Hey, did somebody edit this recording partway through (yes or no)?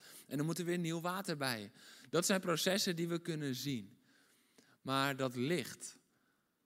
no